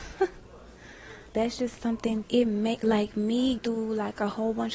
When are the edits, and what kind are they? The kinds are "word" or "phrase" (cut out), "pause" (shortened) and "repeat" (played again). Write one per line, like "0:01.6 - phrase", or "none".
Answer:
0:01.3 - word
0:02.2 - word
0:03.6 - word